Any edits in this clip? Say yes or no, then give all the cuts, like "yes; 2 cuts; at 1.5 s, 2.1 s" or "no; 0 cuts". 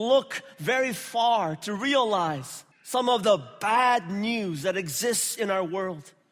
yes; 1 cut; at 2.7 s